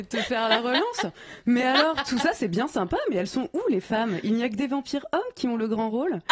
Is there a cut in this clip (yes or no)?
no